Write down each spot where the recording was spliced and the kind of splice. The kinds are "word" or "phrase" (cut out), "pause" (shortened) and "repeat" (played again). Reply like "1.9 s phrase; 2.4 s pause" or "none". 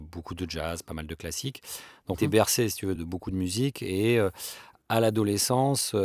2.1 s phrase; 3.0 s word